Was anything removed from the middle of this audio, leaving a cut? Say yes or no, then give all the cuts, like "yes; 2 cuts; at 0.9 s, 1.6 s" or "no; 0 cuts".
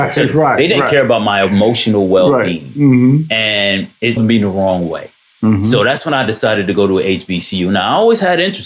yes; 1 cut; at 4.2 s